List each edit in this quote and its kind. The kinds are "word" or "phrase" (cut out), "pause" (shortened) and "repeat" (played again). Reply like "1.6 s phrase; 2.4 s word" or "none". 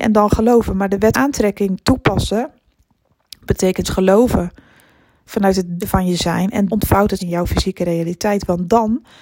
1.1 s word; 3.8 s word; 5.8 s word; 6.7 s word; 7.2 s word